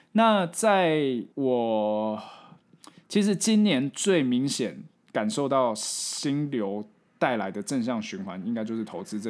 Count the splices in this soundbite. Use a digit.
1